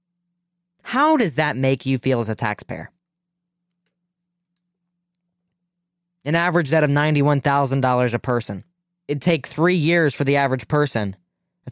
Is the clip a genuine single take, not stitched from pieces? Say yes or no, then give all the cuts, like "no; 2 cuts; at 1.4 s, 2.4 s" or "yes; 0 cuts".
no; 1 cut; at 8.8 s